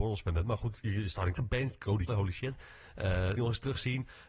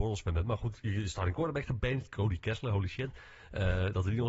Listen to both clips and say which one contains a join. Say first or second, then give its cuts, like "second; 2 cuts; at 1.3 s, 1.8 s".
first; 3 cuts; at 1.4 s, 2.1 s, 3.4 s